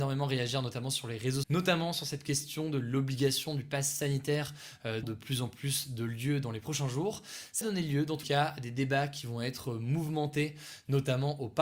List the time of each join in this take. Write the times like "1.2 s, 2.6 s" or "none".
1.4 s, 5.0 s, 7.6 s, 8.2 s